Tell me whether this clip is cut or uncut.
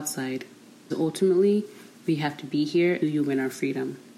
cut